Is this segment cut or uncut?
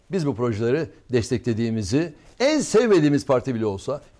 uncut